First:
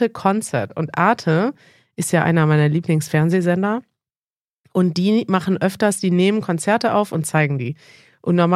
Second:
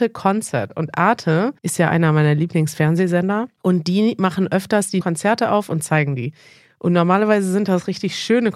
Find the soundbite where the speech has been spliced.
second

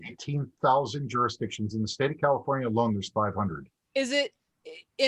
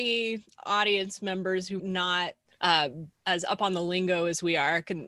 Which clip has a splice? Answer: second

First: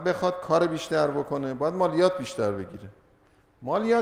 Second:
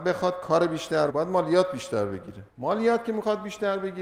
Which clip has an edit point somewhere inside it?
second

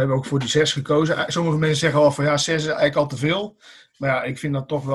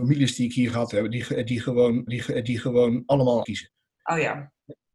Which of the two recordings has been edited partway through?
second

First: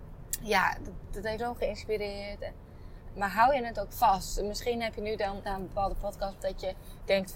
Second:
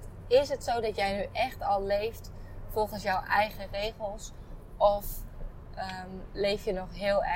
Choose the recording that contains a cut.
first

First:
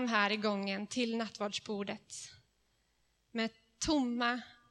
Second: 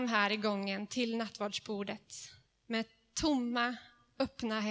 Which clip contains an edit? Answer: second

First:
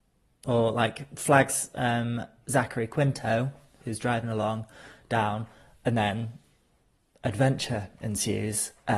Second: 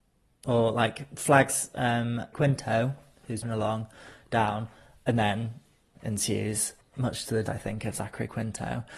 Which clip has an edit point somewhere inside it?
second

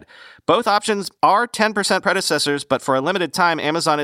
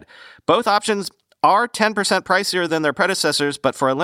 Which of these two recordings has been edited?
first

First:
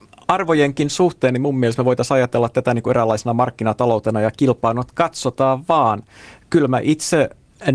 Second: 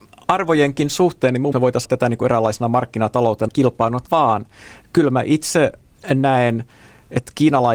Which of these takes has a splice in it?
second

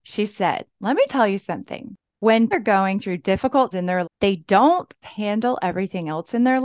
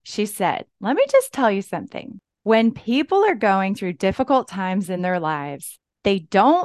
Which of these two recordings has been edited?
first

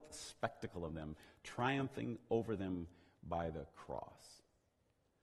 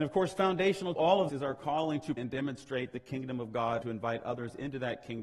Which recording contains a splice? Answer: second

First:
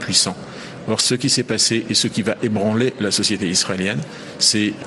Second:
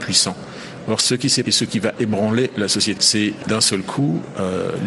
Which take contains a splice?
second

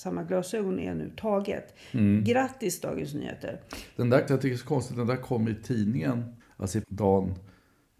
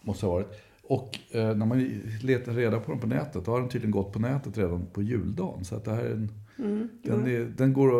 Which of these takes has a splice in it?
first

